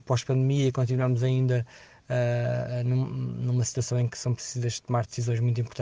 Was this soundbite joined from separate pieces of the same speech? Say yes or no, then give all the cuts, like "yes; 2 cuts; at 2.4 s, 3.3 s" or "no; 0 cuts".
no; 0 cuts